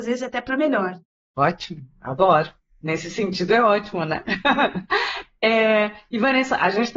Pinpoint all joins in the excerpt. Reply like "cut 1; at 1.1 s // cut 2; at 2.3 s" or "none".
none